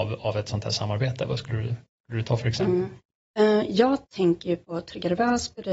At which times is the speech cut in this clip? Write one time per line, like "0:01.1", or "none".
none